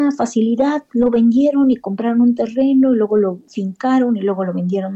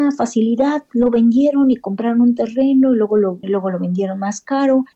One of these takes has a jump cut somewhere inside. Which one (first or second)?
second